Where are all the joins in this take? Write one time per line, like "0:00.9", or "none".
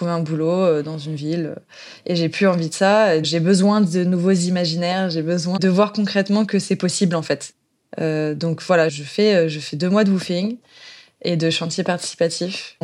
0:03.2
0:05.6